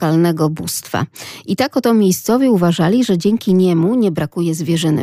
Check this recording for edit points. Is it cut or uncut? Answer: uncut